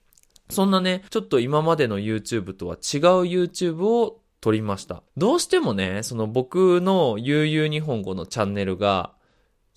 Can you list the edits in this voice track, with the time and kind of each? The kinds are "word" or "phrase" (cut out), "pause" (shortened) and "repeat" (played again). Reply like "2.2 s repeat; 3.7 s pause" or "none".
1.1 s pause; 5.1 s pause